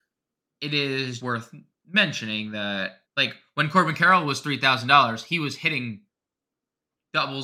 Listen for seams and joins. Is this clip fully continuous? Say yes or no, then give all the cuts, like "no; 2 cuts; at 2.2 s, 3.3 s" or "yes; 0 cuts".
no; 2 cuts; at 1.2 s, 3.0 s